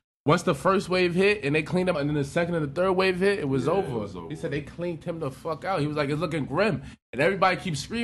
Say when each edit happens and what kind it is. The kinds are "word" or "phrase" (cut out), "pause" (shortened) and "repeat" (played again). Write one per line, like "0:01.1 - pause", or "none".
0:01.9 - word